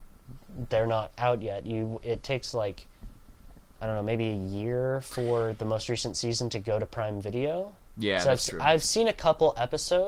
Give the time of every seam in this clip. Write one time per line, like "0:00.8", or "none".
none